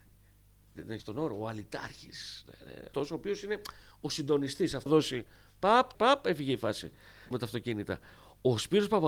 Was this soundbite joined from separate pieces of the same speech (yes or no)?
yes